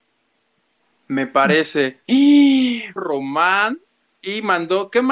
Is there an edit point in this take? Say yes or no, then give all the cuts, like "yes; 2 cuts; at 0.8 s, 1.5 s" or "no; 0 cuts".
yes; 1 cut; at 3.0 s